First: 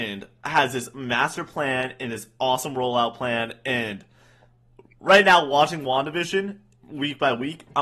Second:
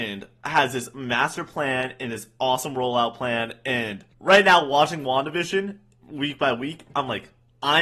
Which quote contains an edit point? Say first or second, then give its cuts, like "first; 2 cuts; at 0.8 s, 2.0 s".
second; 1 cut; at 4.1 s